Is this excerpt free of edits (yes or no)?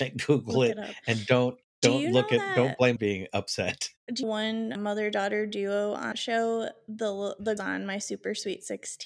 no